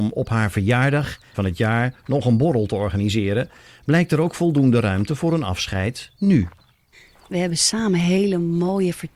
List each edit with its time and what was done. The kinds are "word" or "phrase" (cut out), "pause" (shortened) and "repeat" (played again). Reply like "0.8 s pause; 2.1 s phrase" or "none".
1.3 s word